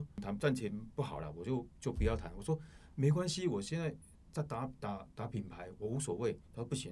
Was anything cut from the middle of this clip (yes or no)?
no